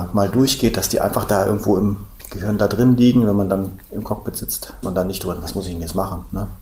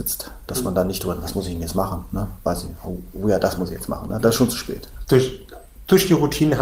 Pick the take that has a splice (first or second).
first